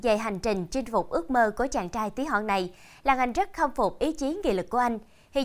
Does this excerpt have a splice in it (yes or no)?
no